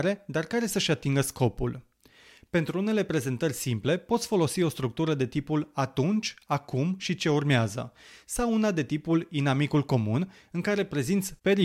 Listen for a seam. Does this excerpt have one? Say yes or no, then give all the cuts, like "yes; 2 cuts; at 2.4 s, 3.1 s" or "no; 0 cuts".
no; 0 cuts